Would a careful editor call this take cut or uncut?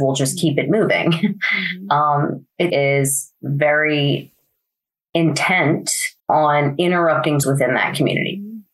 cut